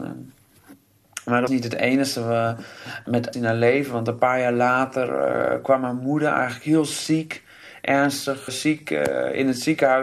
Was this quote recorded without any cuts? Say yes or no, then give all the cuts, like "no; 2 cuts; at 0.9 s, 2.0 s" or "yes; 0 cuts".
no; 3 cuts; at 1.5 s, 3.3 s, 8.5 s